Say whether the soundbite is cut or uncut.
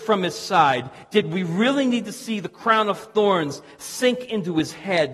uncut